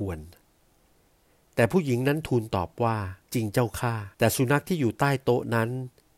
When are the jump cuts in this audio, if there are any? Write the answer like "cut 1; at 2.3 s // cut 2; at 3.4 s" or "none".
cut 1; at 3.2 s // cut 2; at 4.1 s

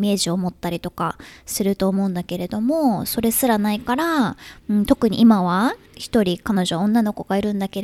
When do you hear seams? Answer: cut 1; at 4.6 s // cut 2; at 5.9 s

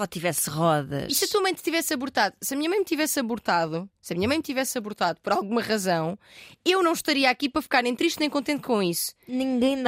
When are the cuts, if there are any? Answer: cut 1; at 3.9 s

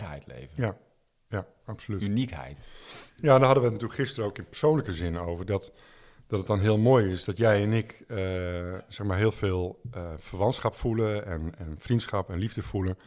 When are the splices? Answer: none

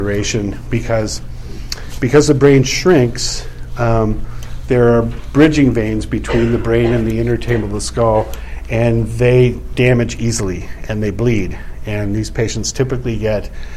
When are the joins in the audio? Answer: none

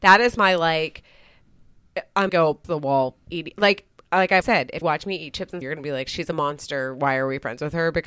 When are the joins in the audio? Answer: cut 1; at 2.3 s // cut 2; at 2.6 s // cut 3; at 3.2 s // cut 4; at 4.4 s // cut 5; at 4.8 s // cut 6; at 5.6 s

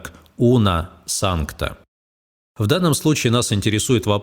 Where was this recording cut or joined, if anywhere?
cut 1; at 2.2 s

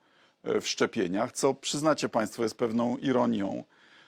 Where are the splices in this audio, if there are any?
none

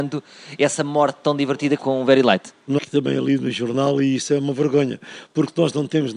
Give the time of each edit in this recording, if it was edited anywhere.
cut 1; at 2.8 s

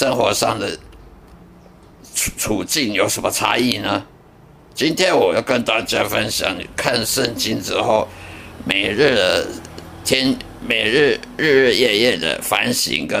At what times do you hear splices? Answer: cut 1; at 4.2 s

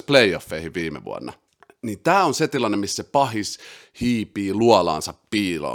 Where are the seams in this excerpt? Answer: cut 1; at 1.5 s

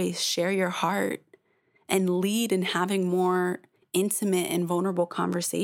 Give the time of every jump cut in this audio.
none

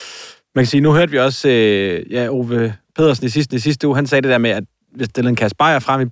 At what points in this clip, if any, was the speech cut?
cut 1; at 3.5 s // cut 2; at 5.1 s

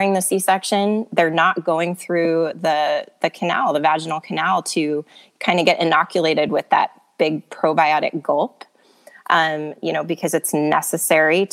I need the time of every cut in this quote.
none

